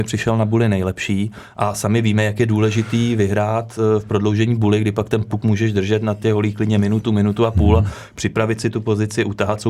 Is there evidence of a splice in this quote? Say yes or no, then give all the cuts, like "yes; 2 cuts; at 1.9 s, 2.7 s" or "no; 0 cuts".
no; 0 cuts